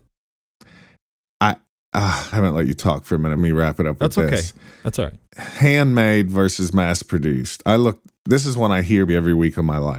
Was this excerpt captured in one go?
no; 4 cuts; at 2.3 s, 3.4 s, 5.3 s, 9.1 s

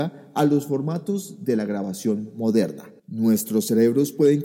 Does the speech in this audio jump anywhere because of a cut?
yes; 1 cut; at 3.0 s

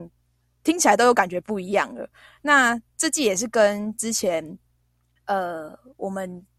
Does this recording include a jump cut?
no; 0 cuts

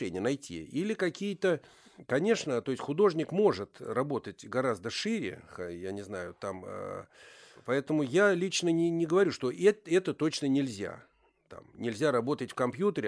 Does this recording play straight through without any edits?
yes; 0 cuts

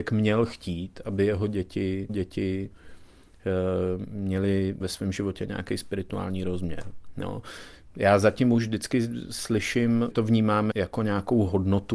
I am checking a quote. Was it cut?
yes; 4 cuts; at 2.1 s, 4.8 s, 10.1 s, 10.7 s

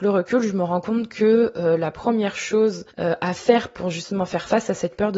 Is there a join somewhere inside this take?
yes; 1 cut; at 2.9 s

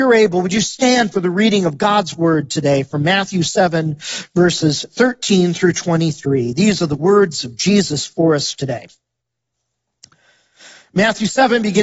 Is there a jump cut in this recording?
no; 0 cuts

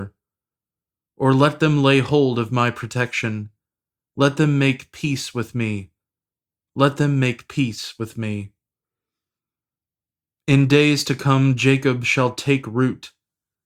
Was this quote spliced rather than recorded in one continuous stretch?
no; 0 cuts

